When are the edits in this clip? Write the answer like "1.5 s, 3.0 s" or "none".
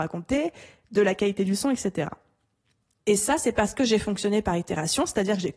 none